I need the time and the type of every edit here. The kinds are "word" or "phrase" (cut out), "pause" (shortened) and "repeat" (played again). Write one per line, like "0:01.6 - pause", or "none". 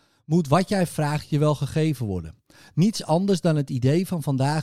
none